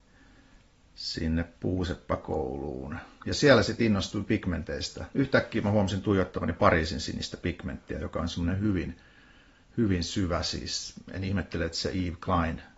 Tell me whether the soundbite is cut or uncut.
uncut